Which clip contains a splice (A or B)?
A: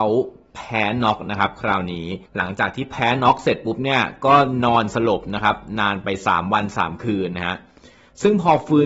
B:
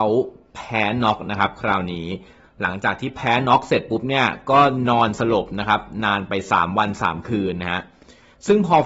A